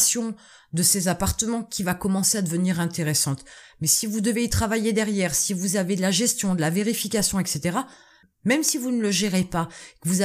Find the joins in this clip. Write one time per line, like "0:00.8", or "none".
none